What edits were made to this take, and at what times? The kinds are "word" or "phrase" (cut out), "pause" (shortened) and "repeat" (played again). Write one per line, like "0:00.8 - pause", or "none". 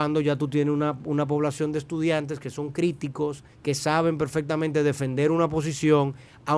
0:03.5 - pause

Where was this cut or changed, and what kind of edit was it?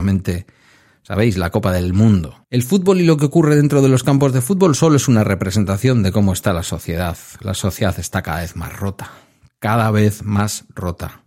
0:02.4 - pause

